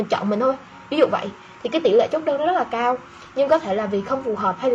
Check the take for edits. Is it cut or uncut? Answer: uncut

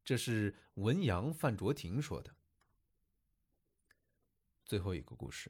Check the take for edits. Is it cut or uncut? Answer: uncut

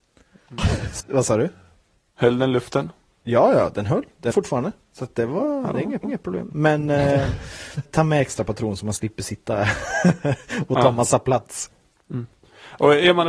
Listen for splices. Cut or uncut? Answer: cut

